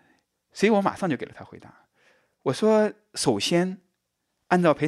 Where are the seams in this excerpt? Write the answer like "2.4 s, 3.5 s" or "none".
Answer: none